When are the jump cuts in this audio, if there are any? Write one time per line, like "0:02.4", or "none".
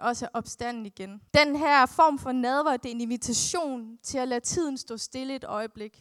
0:01.3